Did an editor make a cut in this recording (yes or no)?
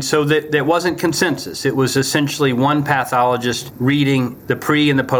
no